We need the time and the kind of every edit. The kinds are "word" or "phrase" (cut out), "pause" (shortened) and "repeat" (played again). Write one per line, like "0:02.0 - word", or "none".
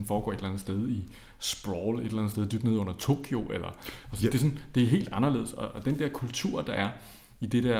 none